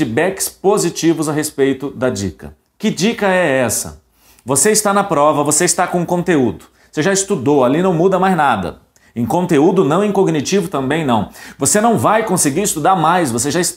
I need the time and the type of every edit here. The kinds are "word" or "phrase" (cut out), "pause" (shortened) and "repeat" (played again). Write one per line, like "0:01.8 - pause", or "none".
none

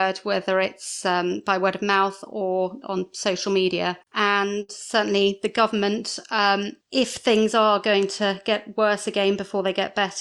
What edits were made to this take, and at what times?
0:04.0 - pause

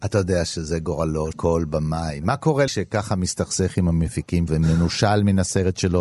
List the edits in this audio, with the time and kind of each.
0:01.3 - word
0:02.7 - word
0:04.5 - word

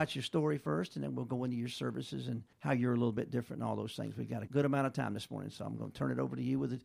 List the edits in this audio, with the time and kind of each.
0:02.5 - pause
0:04.5 - word

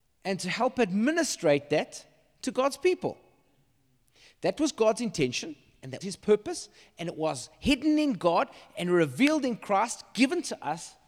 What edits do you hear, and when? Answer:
0:06.0 - word

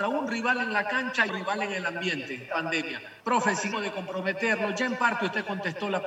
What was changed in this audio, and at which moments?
0:01.3 - word
0:02.5 - word
0:03.2 - pause
0:03.7 - word

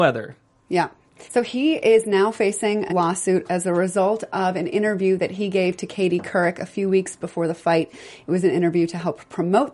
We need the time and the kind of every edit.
0:01.3 - pause
0:02.9 - word

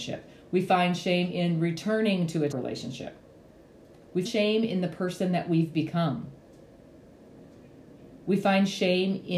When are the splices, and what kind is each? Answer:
0:02.5 - word
0:04.2 - word

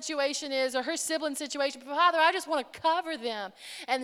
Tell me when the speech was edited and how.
none

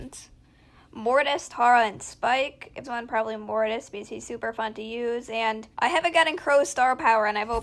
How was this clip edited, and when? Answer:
0:02.8 - phrase
0:05.7 - pause

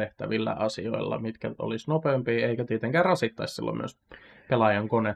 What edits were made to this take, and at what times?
none

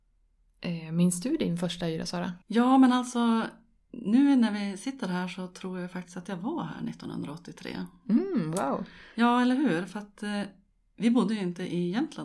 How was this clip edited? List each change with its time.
0:02.4 - pause
0:09.1 - pause

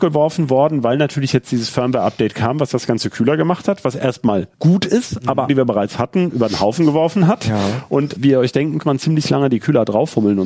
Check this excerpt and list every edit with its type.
0:04.5 - pause
0:05.5 - phrase
0:08.2 - word
0:08.8 - phrase

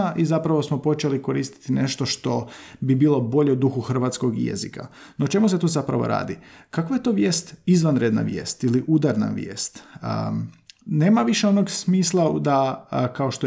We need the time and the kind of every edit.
none

